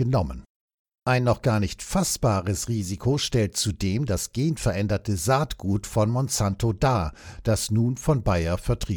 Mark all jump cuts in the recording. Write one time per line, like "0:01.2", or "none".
none